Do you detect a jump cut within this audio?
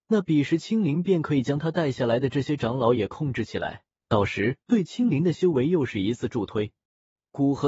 yes; 2 cuts; at 3.9 s, 4.6 s

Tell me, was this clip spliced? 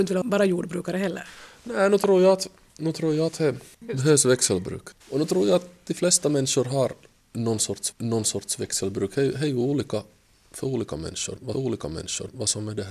yes; 3 cuts; at 5.0 s, 7.9 s, 11.5 s

